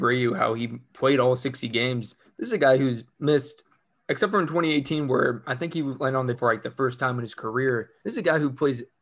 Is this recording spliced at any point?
yes; 3 cuts; at 3.1 s, 6.3 s, 8.0 s

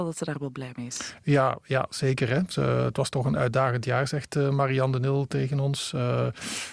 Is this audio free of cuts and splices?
yes; 0 cuts

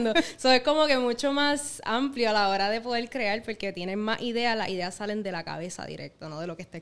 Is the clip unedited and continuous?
yes; 0 cuts

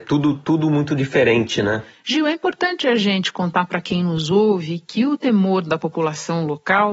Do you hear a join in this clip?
no; 0 cuts

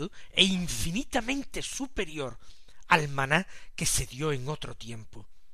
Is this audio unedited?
yes; 0 cuts

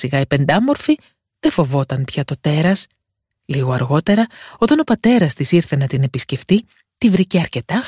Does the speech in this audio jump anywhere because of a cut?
no; 0 cuts

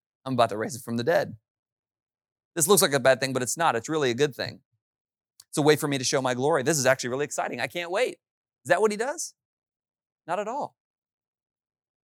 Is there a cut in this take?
no; 0 cuts

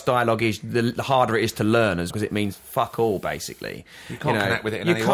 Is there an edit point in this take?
yes; 1 cut; at 2.1 s

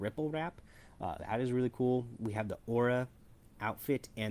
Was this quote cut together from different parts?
yes; 1 cut; at 1.2 s

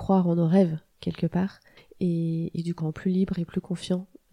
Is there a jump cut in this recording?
yes; 2 cuts; at 1.8 s, 2.8 s

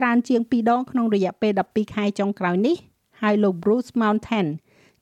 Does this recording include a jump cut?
no; 0 cuts

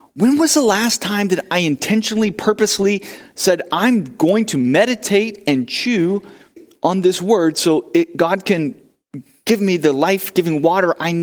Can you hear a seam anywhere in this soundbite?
no; 0 cuts

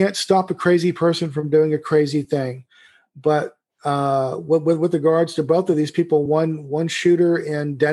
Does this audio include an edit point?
no; 0 cuts

